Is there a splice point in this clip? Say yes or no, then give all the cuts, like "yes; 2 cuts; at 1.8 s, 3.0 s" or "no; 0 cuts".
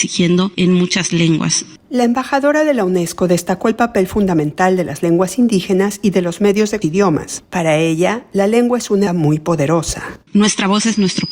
yes; 2 cuts; at 6.8 s, 9.1 s